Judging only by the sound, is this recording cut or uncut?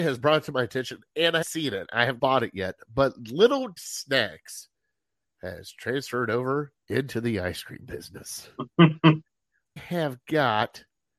cut